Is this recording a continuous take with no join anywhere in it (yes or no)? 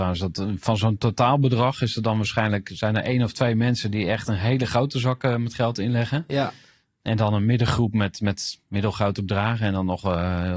yes